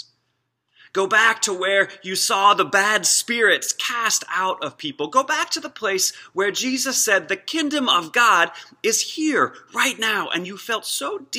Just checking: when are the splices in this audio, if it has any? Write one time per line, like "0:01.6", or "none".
none